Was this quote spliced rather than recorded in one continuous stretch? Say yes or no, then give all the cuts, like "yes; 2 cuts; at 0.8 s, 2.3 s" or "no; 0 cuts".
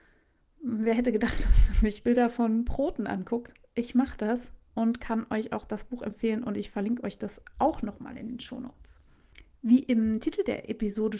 yes; 1 cut; at 2.0 s